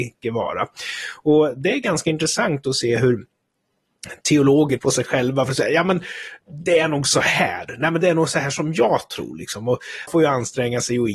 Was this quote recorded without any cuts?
no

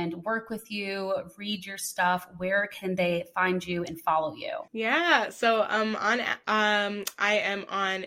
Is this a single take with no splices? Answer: no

